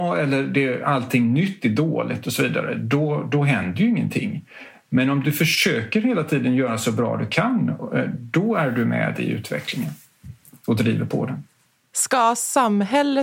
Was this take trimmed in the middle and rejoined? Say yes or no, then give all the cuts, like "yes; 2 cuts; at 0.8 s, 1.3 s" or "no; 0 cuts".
no; 0 cuts